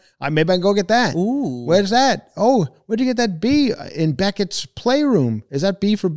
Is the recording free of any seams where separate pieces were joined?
yes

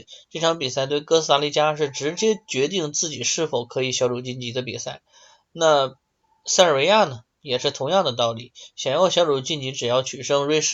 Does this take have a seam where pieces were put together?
no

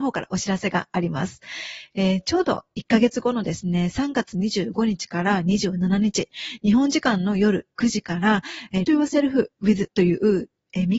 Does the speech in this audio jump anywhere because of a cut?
yes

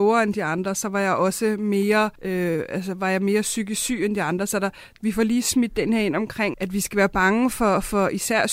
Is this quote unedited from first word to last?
no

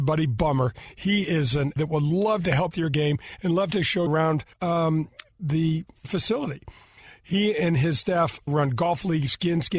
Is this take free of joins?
no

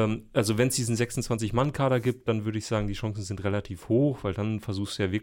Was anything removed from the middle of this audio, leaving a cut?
no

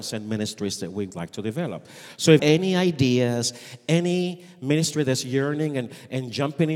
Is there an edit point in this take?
yes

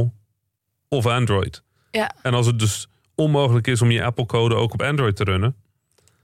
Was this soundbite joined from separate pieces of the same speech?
no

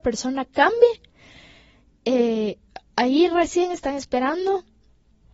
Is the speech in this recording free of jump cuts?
yes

